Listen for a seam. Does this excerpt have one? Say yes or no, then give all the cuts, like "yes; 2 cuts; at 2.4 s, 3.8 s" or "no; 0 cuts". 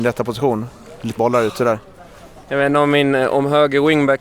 yes; 1 cut; at 1.2 s